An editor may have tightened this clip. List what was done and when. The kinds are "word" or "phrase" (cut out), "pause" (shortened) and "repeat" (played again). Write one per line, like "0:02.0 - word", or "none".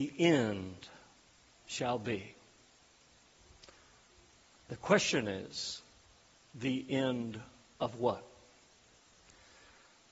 none